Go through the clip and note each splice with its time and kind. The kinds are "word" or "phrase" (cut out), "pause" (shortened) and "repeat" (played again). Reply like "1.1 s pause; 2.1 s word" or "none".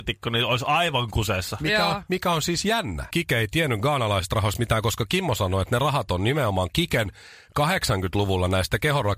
3.1 s word